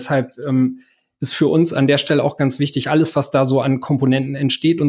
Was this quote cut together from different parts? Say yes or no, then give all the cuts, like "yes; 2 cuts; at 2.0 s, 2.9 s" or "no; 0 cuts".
no; 0 cuts